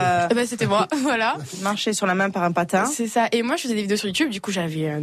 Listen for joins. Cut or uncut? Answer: uncut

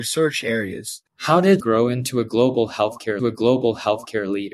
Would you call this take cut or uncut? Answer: cut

